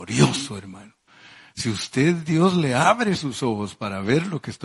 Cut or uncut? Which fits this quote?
uncut